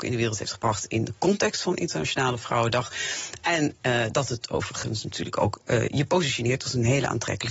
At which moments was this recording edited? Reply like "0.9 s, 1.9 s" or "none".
none

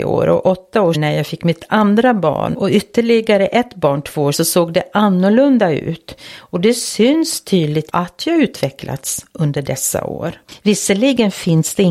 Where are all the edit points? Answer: 0.9 s, 2.5 s, 4.3 s, 7.9 s

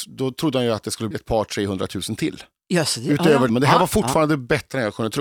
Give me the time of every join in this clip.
1.1 s, 3.5 s

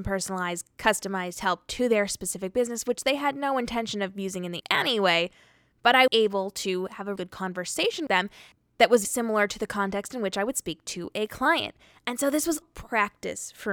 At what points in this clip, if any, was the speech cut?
4.6 s, 6.1 s, 7.2 s, 8.1 s, 9.0 s, 12.6 s

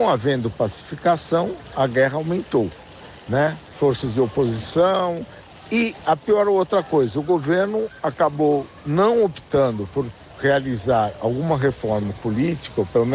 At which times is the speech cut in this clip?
3.6 s

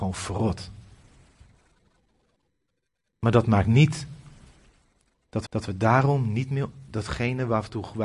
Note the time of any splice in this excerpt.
5.5 s

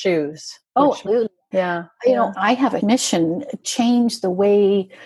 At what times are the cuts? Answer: 1.1 s, 1.5 s, 2.3 s, 2.8 s, 3.6 s

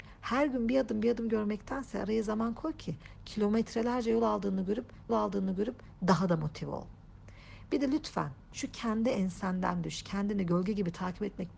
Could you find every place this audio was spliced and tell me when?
5.1 s

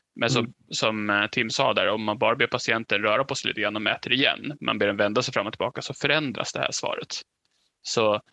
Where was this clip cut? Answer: none

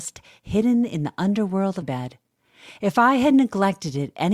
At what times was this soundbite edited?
1.8 s

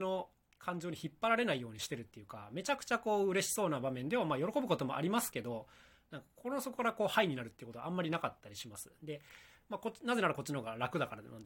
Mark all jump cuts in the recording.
none

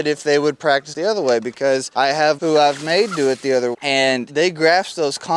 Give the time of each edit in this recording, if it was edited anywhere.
0.9 s, 2.4 s, 3.7 s

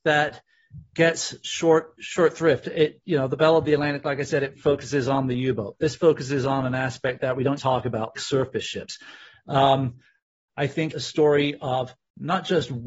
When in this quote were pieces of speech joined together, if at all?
2.0 s, 4.6 s, 7.6 s, 8.2 s, 10.9 s

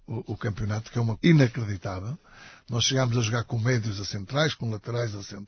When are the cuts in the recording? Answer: 1.2 s

